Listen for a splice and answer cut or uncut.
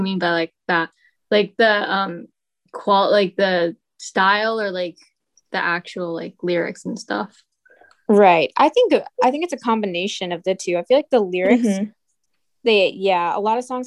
uncut